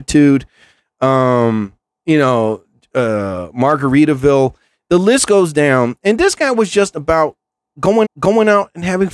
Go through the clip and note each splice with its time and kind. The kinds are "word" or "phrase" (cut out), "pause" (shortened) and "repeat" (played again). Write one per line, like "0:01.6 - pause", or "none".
0:08.0 - repeat